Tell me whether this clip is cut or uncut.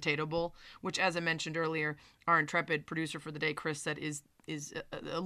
uncut